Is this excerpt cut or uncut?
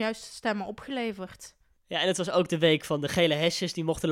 uncut